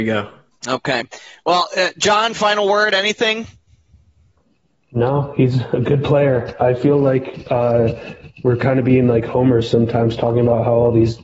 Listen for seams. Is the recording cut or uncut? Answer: uncut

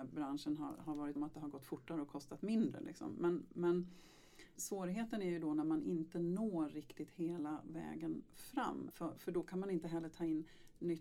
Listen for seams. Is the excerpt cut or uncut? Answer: cut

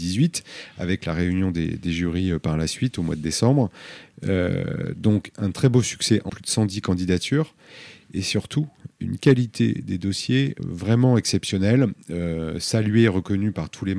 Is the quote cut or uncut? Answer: cut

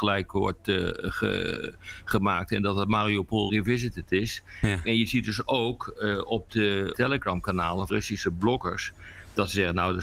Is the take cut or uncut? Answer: cut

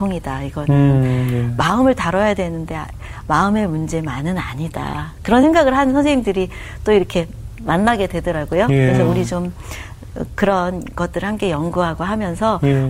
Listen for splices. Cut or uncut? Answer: uncut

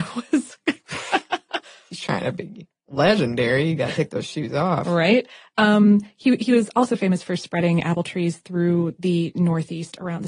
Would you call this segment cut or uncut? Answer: uncut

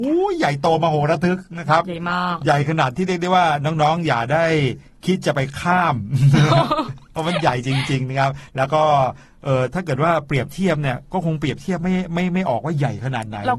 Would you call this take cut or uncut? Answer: uncut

